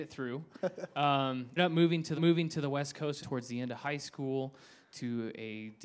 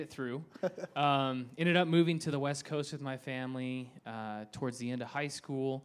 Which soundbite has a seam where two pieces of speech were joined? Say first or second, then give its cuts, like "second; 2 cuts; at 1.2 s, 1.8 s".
first; 3 cuts; at 1.6 s, 2.2 s, 3.2 s